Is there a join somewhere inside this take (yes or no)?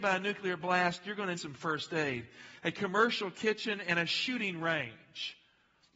yes